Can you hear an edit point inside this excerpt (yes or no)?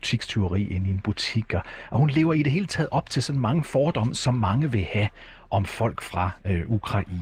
no